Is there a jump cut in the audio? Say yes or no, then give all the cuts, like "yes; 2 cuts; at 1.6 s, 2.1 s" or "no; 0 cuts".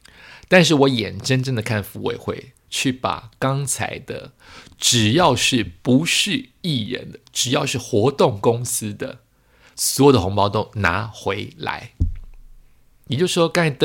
no; 0 cuts